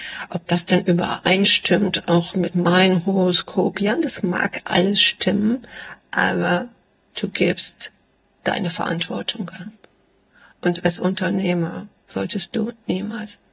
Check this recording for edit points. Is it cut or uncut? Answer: uncut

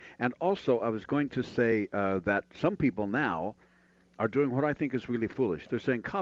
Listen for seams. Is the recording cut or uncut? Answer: uncut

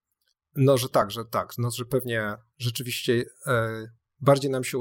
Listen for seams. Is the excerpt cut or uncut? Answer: uncut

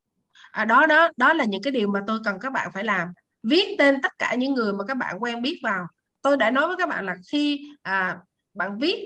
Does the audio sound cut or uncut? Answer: uncut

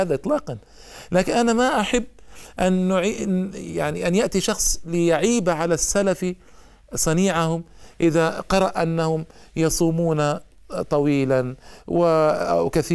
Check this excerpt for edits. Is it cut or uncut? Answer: uncut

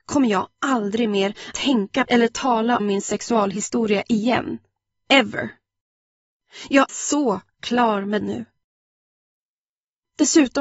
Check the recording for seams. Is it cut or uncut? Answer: cut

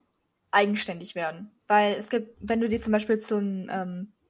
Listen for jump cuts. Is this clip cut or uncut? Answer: cut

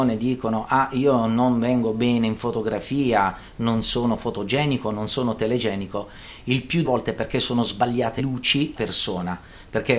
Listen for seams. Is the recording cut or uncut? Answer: cut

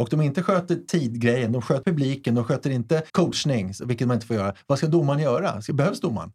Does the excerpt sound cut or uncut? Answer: cut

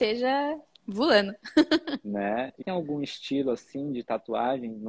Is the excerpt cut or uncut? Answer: cut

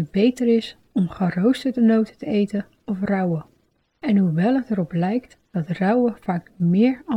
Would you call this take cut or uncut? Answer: uncut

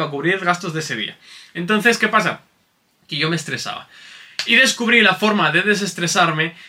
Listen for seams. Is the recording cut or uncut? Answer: uncut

